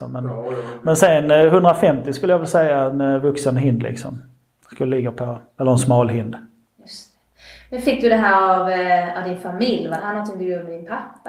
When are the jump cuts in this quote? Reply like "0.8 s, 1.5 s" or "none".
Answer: none